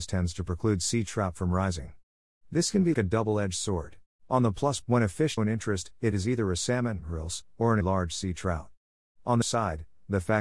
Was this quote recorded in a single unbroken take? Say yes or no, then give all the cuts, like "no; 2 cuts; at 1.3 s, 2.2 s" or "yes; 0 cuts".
no; 6 cuts; at 2.9 s, 4.1 s, 4.8 s, 5.4 s, 7.8 s, 9.4 s